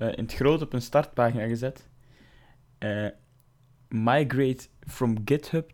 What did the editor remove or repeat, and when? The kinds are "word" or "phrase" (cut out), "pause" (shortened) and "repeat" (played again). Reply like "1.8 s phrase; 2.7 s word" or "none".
none